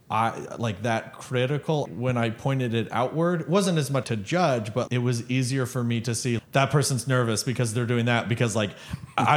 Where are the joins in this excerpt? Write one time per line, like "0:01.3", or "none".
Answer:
0:01.8
0:04.0
0:04.9
0:06.4